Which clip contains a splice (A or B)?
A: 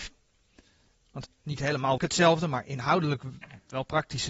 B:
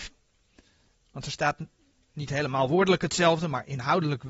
A